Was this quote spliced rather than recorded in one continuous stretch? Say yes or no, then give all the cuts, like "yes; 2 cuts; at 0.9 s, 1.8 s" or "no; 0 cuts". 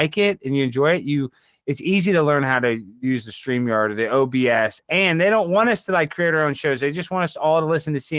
no; 0 cuts